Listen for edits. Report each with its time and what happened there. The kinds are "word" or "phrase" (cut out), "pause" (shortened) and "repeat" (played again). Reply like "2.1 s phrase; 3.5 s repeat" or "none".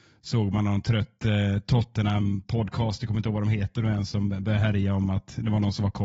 none